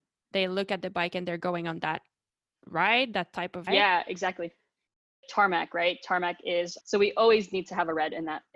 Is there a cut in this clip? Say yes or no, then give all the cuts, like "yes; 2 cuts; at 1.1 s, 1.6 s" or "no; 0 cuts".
yes; 3 cuts; at 3.7 s, 5.2 s, 6.8 s